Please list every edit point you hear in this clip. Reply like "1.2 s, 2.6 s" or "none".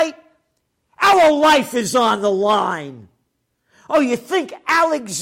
none